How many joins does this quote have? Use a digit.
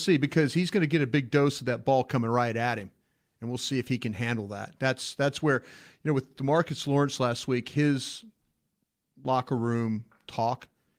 0